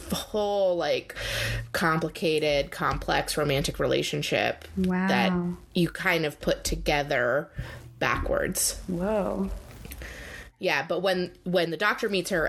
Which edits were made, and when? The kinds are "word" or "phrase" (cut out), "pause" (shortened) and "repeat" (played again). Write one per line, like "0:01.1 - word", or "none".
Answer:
none